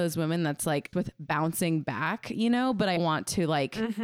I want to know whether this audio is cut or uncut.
cut